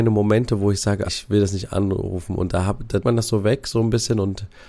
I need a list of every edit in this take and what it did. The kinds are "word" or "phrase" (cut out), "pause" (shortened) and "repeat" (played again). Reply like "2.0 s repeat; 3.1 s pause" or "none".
1.1 s word; 3.0 s word